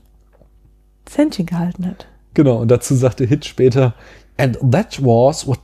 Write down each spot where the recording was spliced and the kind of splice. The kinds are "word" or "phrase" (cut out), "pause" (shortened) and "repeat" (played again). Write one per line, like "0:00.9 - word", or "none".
none